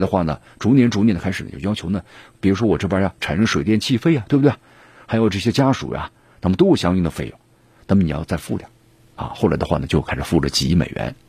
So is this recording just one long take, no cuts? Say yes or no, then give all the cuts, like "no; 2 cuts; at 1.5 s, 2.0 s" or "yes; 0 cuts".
yes; 0 cuts